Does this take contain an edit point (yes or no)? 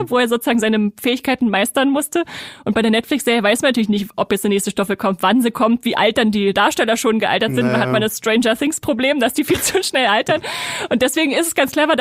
no